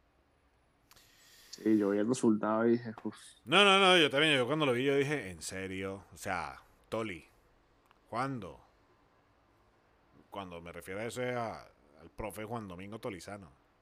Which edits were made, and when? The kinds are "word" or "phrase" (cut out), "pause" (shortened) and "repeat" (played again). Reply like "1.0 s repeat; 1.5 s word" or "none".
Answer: none